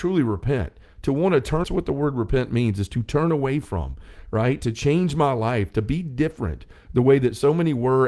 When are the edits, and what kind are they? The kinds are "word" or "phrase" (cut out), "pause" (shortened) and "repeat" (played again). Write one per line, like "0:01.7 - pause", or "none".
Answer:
0:01.6 - phrase